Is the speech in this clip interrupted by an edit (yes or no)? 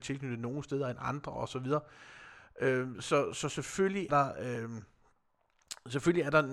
yes